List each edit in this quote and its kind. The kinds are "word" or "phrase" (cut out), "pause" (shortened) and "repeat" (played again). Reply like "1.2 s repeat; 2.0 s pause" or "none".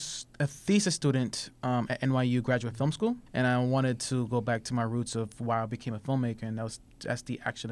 3.3 s pause